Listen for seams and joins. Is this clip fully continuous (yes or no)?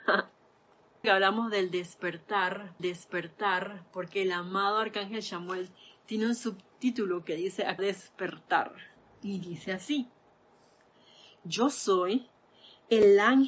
no